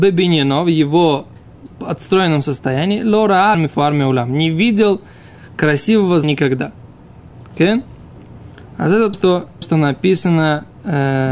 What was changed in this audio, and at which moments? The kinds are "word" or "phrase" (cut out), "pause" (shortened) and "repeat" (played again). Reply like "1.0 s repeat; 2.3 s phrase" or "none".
3.5 s word; 6.2 s word; 9.1 s word; 9.6 s word